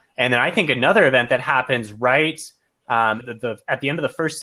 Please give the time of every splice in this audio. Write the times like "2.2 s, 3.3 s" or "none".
3.2 s